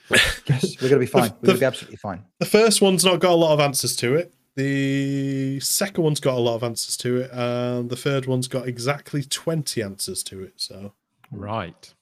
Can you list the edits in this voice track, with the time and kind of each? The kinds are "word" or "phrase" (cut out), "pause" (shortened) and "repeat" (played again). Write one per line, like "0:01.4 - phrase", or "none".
0:02.3 - pause